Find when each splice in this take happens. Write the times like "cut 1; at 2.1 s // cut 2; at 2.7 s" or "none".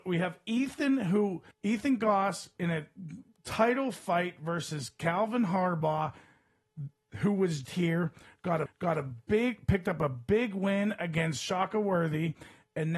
cut 1; at 1.5 s // cut 2; at 7.6 s // cut 3; at 8.7 s